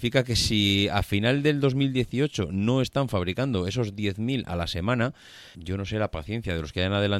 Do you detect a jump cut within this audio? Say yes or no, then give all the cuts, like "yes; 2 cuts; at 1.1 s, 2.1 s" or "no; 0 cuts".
yes; 1 cut; at 5.5 s